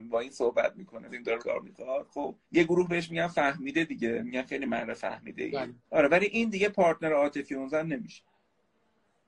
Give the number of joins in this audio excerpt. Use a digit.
4